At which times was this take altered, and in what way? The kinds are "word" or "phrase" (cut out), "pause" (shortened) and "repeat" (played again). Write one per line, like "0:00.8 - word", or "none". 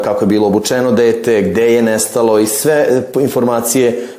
none